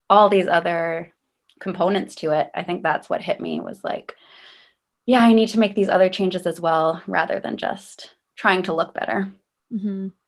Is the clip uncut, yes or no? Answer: yes